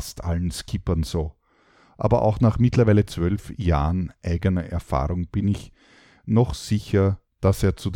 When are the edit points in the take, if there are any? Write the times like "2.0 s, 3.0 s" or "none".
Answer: none